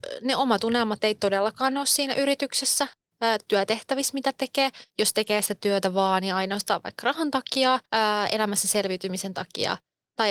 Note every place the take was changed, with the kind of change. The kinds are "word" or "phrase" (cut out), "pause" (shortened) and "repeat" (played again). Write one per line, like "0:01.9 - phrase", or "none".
0:03.5 - word
0:04.9 - pause
0:07.9 - pause